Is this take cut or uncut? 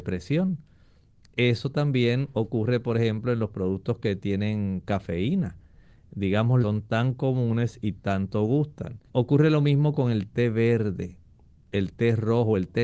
cut